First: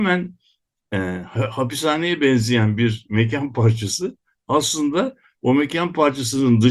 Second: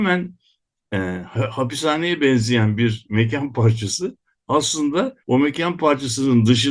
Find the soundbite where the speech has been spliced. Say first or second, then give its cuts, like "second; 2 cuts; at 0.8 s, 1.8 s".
second; 1 cut; at 5.2 s